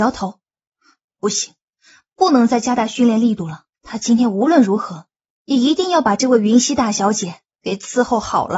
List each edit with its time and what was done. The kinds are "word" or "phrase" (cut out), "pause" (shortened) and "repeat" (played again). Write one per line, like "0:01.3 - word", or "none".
0:03.7 - pause